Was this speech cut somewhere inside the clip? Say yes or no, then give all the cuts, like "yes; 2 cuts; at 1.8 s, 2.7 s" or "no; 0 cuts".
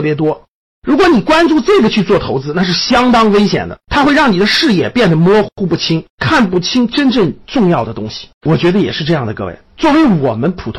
yes; 3 cuts; at 3.8 s, 6.1 s, 8.3 s